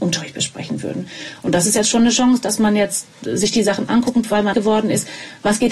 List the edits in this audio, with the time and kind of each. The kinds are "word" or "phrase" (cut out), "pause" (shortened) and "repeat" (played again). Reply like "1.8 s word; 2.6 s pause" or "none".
3.9 s word; 4.5 s word